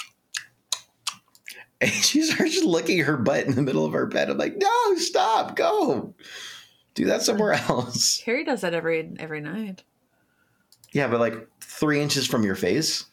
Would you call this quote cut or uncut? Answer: uncut